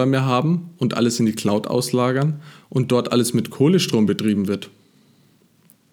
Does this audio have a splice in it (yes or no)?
no